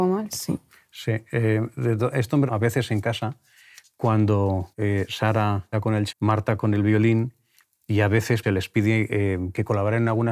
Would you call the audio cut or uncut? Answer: cut